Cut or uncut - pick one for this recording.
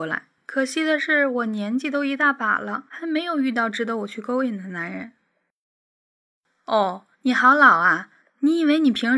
cut